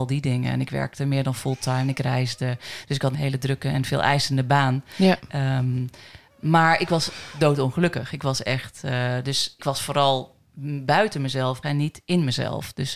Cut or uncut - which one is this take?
cut